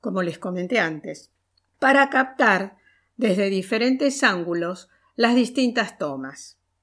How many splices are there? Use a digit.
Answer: 0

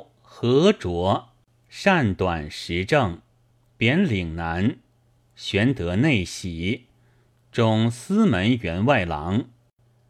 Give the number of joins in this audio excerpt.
0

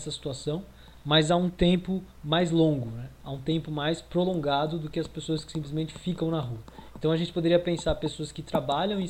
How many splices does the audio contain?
0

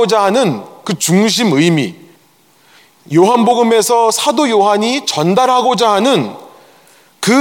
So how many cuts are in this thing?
0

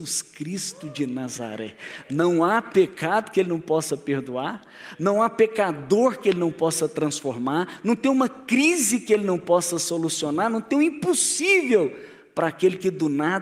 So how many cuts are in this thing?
0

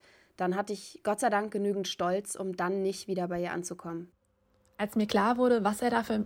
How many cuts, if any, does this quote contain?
0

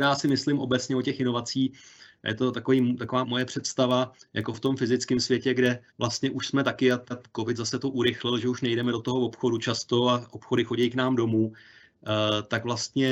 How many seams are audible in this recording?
3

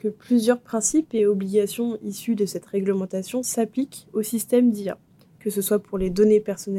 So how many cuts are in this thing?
0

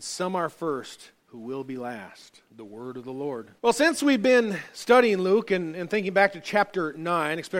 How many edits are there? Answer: 3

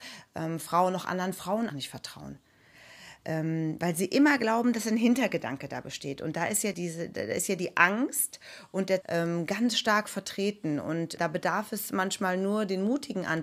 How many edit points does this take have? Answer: 4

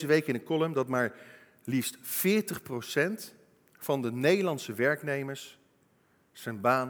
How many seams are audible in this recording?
0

